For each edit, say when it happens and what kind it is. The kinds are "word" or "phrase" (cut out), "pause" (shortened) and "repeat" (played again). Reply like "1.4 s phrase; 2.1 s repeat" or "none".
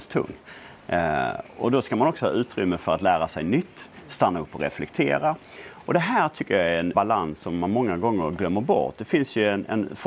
6.9 s word